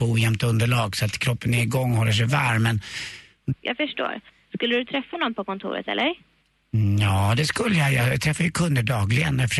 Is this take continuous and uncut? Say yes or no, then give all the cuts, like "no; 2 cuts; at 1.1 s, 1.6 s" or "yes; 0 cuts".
yes; 0 cuts